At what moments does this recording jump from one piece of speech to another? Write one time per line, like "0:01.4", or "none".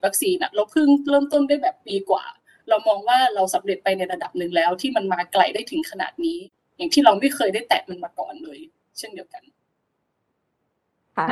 none

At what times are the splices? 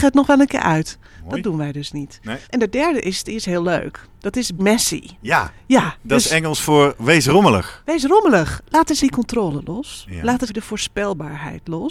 0:02.4
0:04.6
0:09.0
0:10.5

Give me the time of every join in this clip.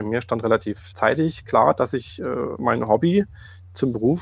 0:00.9

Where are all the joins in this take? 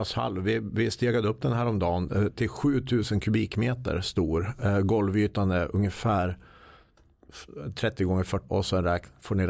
0:08.5

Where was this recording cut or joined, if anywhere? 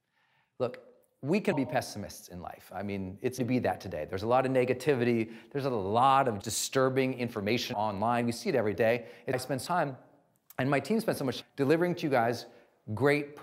0:01.5
0:03.4
0:06.4
0:07.7
0:09.3
0:09.7
0:11.4

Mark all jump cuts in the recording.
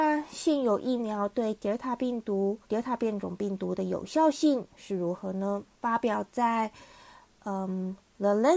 0:02.6
0:05.7

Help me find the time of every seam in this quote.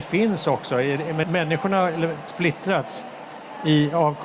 0:01.2
0:02.3

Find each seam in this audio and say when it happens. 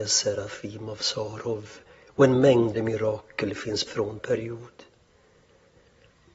0:01.9
0:02.8
0:03.9
0:04.2

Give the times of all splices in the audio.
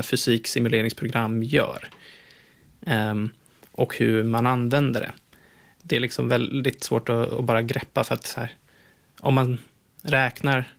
none

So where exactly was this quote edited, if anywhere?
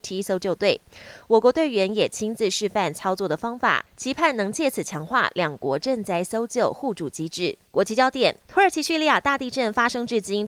0:07.7
0:08.4

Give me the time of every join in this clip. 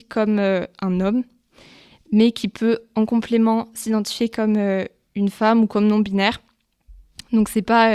none

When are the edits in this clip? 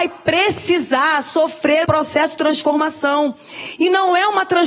0:01.8

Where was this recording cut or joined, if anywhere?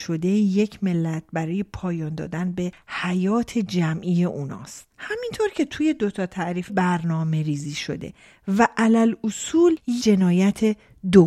0:04.9
0:06.7
0:10.0

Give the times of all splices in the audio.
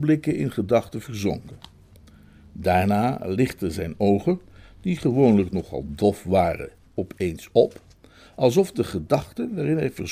none

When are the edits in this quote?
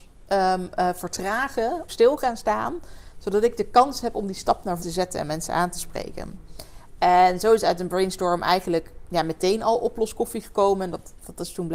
0:01.9
0:04.8

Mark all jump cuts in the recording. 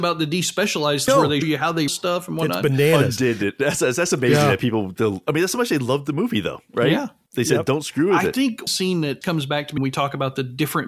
0:01.1
0:01.4
0:01.9
0:05.0
0:08.7
0:09.2
0:09.8

